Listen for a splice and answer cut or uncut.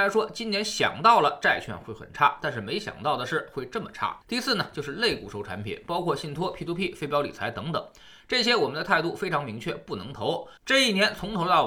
cut